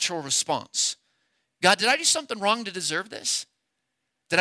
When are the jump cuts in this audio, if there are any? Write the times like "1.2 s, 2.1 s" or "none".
none